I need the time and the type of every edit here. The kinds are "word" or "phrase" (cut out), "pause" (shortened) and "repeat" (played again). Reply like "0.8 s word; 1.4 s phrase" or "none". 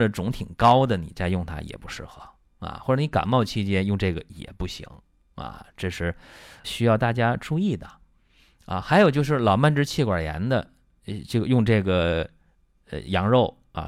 6.6 s word